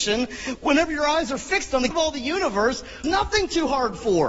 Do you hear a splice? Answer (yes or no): yes